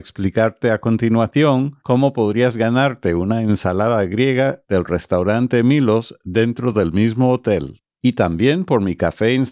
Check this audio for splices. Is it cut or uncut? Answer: uncut